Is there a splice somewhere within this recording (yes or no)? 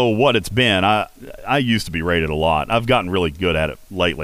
no